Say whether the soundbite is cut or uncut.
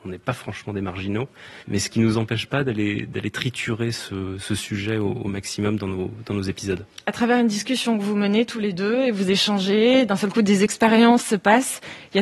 cut